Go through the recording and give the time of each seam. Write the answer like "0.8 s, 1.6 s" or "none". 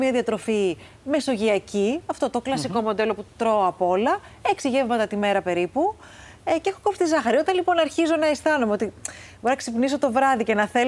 none